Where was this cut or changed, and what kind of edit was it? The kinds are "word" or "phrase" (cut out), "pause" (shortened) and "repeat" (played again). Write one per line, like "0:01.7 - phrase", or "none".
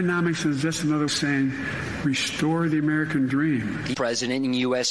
0:01.1 - phrase
0:03.9 - word

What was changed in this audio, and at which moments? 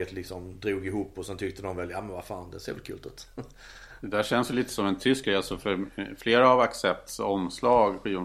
none

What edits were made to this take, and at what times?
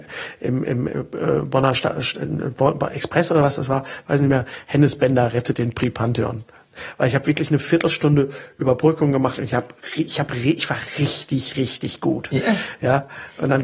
none

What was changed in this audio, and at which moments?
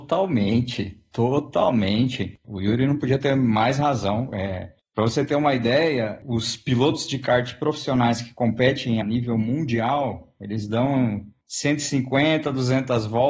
0:09.0 - word

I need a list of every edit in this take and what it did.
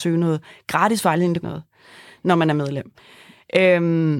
0:01.4 - phrase

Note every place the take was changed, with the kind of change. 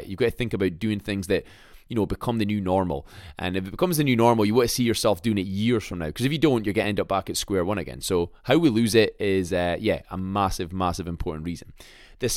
none

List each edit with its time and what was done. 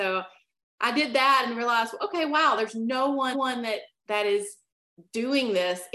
0:03.3 - repeat

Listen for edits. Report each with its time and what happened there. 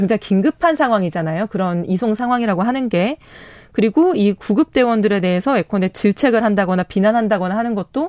none

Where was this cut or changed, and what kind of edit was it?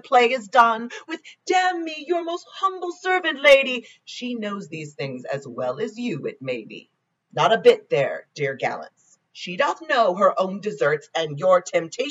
0:07.2 - pause
0:09.2 - pause

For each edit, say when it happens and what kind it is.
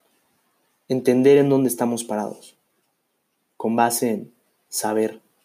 none

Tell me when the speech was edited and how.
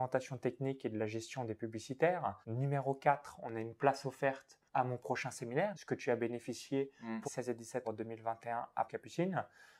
0:02.4 - pause
0:04.7 - pause
0:05.7 - word
0:07.2 - phrase
0:07.8 - word
0:08.9 - phrase

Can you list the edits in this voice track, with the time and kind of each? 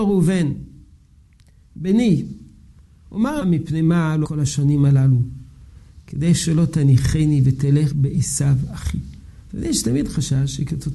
0:03.4 - word
0:04.2 - word
0:07.9 - word

